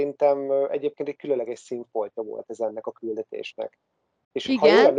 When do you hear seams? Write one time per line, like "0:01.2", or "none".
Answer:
none